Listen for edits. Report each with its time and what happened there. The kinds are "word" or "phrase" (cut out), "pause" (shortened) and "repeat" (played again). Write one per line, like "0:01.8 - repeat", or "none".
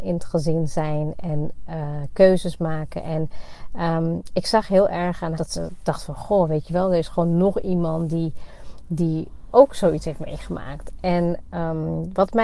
0:05.3 - phrase